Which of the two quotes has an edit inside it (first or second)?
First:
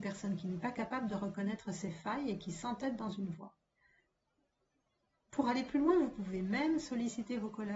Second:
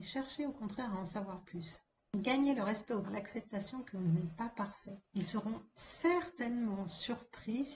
second